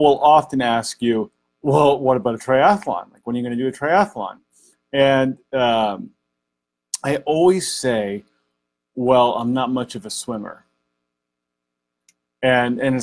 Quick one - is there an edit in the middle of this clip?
no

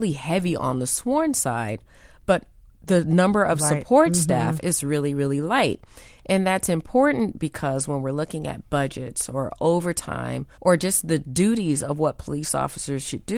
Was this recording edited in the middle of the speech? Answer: yes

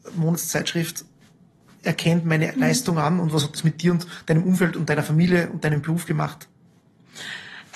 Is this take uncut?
yes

